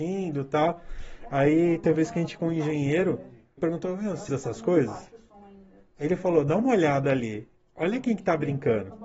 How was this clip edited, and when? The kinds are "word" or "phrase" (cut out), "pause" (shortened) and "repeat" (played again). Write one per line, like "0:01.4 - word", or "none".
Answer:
0:01.9 - word
0:02.4 - word
0:03.6 - word
0:04.3 - word